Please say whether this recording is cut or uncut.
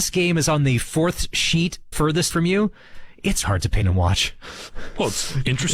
cut